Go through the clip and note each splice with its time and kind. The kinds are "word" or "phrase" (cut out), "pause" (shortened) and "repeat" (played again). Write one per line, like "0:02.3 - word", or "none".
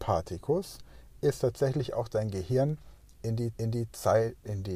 0:03.6 - repeat